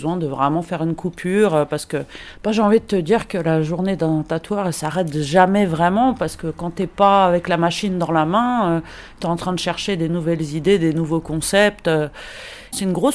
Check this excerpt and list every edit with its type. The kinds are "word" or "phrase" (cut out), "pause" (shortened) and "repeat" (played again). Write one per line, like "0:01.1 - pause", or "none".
none